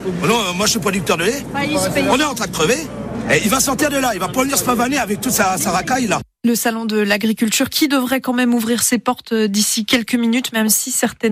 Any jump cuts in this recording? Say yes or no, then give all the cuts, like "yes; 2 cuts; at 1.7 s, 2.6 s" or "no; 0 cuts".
no; 0 cuts